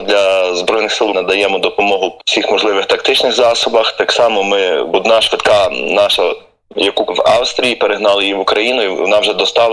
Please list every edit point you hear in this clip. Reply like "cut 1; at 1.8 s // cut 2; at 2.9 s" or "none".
cut 1; at 1.1 s // cut 2; at 2.2 s // cut 3; at 4.9 s // cut 4; at 7.1 s